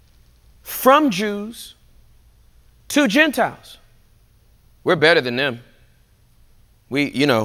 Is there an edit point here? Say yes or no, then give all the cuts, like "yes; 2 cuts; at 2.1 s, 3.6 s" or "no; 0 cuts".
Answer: no; 0 cuts